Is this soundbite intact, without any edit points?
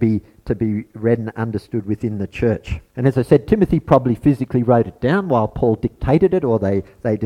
no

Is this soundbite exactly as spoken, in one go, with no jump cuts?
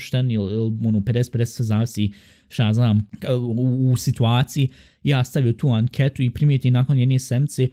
yes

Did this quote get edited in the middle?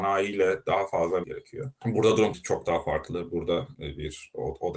yes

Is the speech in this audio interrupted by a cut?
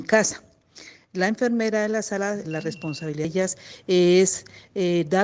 yes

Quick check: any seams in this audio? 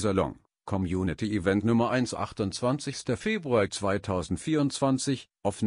no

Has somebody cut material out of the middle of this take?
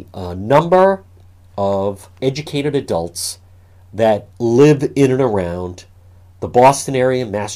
yes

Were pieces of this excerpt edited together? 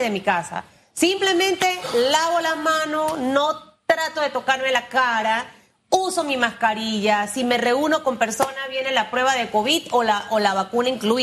no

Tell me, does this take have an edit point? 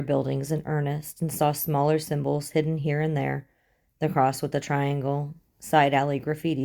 no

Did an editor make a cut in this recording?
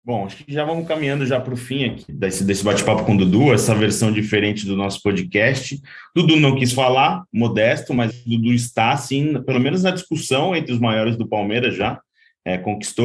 yes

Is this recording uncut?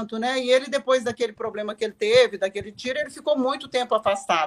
yes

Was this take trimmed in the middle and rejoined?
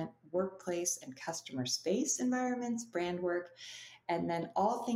no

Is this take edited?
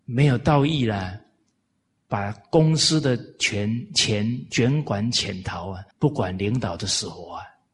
yes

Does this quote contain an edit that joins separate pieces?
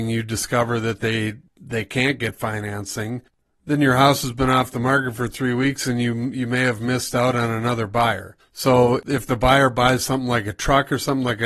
no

